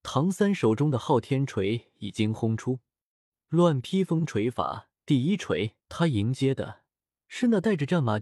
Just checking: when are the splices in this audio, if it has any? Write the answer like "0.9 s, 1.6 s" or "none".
5.0 s, 5.8 s